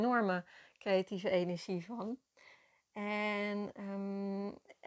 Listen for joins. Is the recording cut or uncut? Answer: uncut